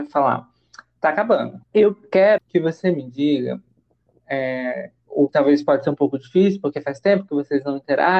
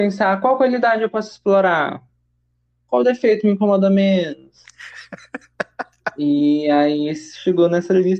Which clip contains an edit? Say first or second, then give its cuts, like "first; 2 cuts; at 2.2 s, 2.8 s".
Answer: first; 3 cuts; at 1.6 s, 2.4 s, 5.3 s